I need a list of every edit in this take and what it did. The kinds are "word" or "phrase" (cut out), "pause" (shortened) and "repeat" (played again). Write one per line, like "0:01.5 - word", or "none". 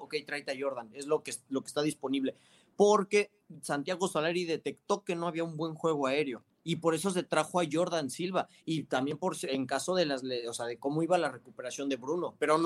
0:06.5 - pause